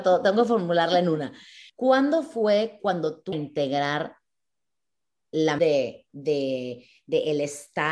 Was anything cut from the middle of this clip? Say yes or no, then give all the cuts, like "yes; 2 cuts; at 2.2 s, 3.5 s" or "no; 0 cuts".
yes; 4 cuts; at 1.7 s, 3.3 s, 5.6 s, 6.1 s